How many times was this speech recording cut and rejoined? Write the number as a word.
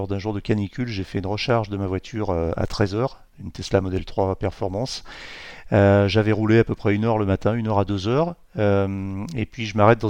zero